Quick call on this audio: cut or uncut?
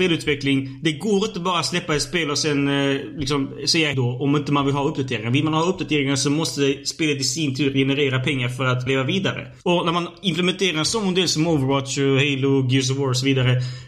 cut